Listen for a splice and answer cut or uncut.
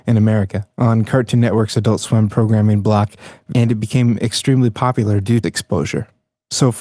cut